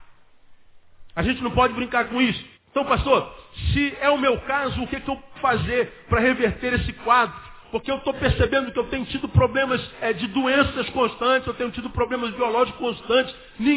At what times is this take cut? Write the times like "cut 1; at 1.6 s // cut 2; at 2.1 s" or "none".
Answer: cut 1; at 2.6 s // cut 2; at 5.4 s // cut 3; at 10.0 s